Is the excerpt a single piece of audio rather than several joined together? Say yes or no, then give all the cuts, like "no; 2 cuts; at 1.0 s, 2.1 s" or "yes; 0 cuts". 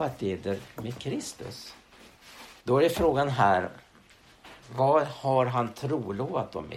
no; 1 cut; at 2.6 s